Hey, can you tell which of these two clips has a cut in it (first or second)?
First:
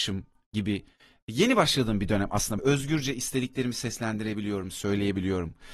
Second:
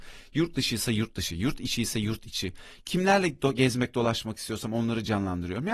first